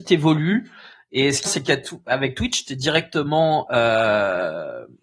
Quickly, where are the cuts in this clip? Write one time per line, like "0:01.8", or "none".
0:01.5